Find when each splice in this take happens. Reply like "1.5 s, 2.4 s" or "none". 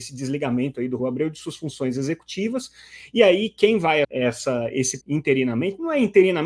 1.0 s, 4.0 s, 5.0 s